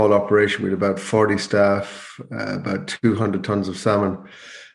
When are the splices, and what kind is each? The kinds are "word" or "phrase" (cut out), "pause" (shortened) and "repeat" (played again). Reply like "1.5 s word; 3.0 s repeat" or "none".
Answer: none